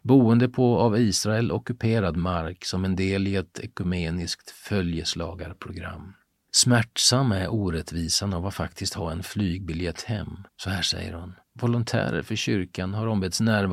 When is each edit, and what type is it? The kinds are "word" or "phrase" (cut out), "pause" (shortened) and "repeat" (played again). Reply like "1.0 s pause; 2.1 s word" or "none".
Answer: 10.5 s pause; 11.4 s pause

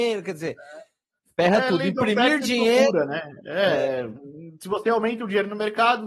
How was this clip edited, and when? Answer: none

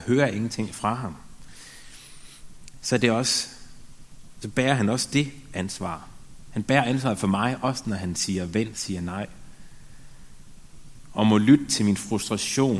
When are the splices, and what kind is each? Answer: 8.7 s word

